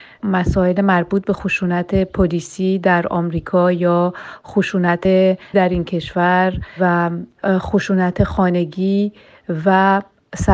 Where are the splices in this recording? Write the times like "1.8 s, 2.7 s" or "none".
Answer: 5.5 s